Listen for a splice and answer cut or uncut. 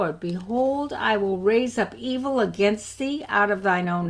uncut